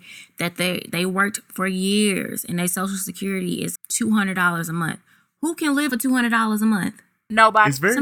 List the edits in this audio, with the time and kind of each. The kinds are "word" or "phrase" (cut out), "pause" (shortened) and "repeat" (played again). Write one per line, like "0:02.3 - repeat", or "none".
0:03.8 - word
0:05.9 - word